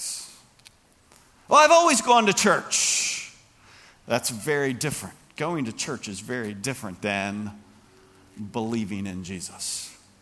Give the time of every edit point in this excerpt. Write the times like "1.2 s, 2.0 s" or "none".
none